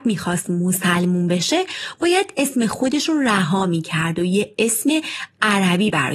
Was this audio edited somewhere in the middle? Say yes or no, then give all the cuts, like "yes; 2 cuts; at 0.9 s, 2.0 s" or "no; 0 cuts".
no; 0 cuts